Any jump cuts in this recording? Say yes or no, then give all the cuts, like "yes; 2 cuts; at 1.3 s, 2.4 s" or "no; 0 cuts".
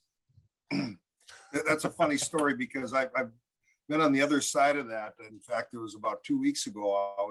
no; 0 cuts